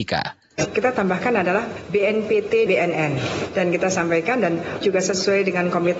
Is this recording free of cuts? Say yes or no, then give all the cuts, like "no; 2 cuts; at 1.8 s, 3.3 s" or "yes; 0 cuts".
no; 2 cuts; at 2.7 s, 4.8 s